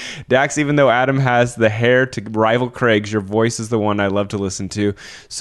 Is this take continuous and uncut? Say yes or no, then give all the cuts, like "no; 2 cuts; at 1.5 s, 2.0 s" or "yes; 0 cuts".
yes; 0 cuts